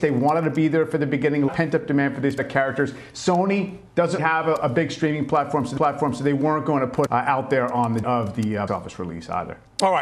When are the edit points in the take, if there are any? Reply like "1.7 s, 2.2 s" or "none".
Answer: 1.5 s, 2.4 s, 4.2 s, 5.8 s, 7.1 s, 8.0 s, 8.7 s